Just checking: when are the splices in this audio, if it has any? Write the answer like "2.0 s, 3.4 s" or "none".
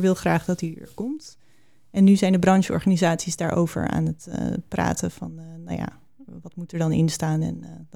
none